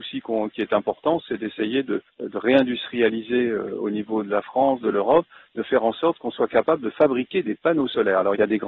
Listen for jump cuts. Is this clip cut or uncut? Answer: uncut